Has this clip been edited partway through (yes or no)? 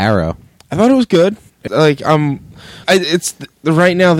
yes